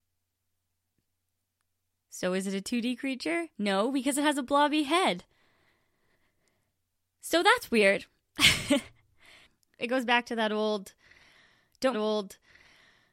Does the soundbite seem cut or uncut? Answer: cut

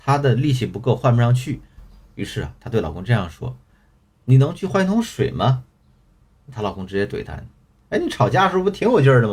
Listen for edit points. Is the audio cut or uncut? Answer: uncut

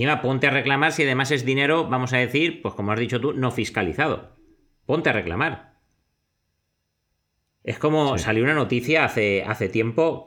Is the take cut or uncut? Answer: uncut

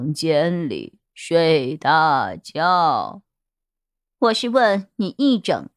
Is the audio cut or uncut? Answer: uncut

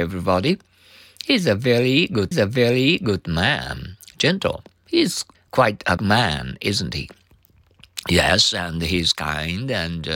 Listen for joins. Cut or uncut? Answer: cut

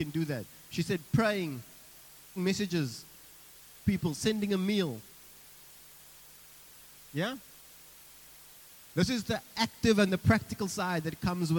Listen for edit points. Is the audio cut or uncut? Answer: cut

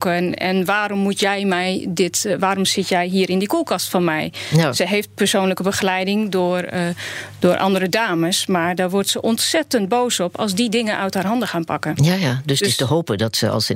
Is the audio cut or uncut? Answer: uncut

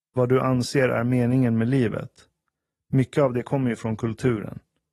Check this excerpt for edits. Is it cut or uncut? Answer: uncut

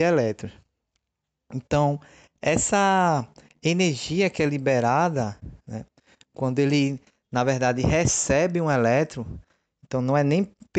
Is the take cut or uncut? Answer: uncut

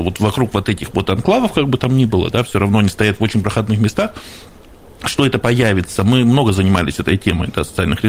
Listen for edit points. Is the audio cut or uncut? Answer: uncut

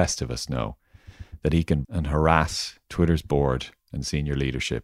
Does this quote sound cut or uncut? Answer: cut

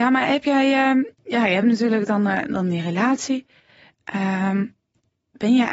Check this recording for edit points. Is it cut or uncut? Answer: uncut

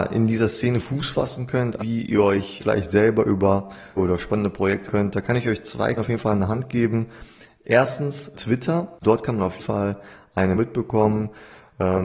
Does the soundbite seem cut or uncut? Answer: cut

